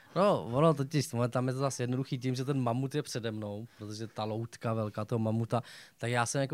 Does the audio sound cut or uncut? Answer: cut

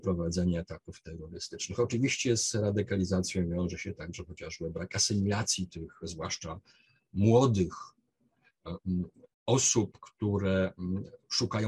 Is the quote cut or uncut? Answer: uncut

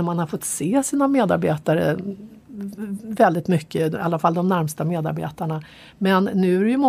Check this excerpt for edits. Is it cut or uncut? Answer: uncut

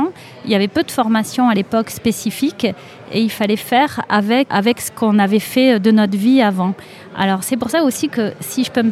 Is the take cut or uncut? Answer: cut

